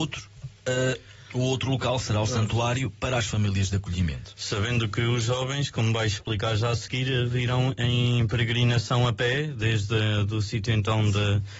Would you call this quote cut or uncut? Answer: uncut